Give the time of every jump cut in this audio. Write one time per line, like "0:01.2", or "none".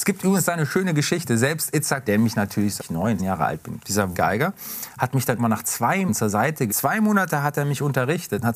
0:02.1
0:02.8
0:03.2
0:03.8
0:04.1
0:05.4
0:06.1
0:06.7